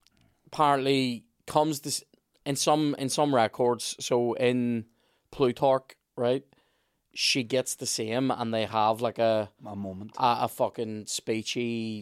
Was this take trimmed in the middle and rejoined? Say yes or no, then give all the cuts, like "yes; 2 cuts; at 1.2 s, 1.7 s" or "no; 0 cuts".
no; 0 cuts